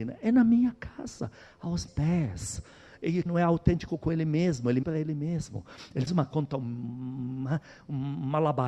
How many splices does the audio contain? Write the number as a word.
four